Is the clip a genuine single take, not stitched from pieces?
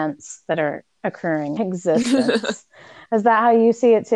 no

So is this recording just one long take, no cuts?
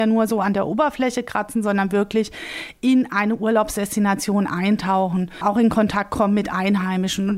yes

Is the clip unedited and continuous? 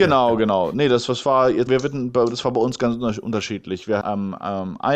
no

